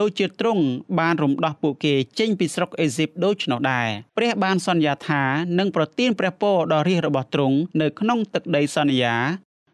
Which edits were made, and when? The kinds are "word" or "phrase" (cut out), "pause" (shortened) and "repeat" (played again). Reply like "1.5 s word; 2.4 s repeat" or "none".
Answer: 4.1 s pause; 7.7 s pause